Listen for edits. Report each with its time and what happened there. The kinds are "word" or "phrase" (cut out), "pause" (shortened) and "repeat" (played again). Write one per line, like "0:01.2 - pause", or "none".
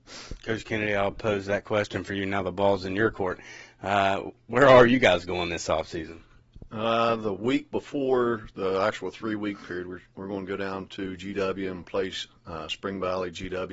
0:10.1 - pause